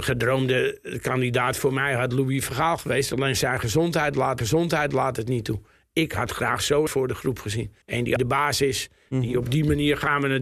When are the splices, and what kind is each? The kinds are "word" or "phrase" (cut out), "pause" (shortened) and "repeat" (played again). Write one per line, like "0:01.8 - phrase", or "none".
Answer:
0:04.4 - repeat
0:06.9 - word
0:07.8 - pause
0:08.2 - phrase